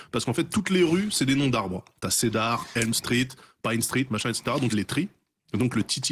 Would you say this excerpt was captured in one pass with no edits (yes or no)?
no